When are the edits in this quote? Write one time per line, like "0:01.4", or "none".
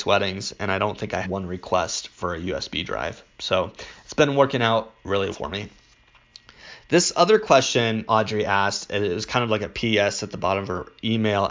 0:01.2
0:05.3
0:08.1